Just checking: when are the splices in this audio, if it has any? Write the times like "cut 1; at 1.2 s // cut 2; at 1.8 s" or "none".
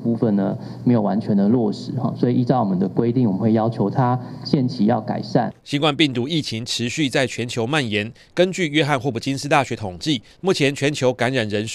cut 1; at 5.6 s